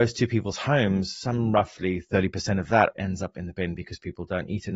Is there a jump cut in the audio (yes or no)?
yes